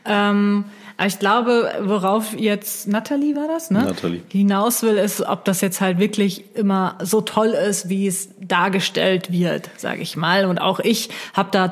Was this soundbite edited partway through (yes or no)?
no